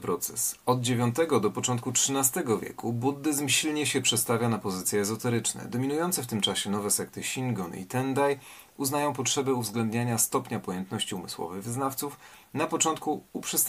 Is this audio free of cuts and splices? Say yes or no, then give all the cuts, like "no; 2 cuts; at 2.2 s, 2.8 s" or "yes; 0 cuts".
yes; 0 cuts